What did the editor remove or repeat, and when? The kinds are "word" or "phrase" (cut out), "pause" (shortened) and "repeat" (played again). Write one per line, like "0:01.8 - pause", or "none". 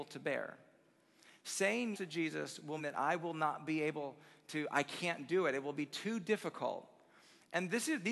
0:01.9 - word
0:02.8 - word